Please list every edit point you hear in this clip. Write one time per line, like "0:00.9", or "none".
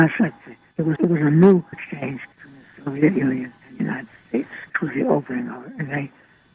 0:01.0
0:01.7
0:02.3
0:03.6
0:04.7